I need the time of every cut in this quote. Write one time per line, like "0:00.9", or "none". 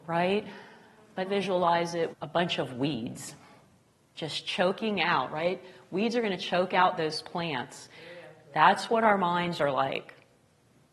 0:01.3
0:02.1